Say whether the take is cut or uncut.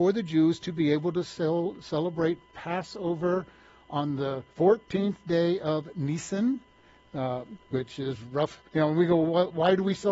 cut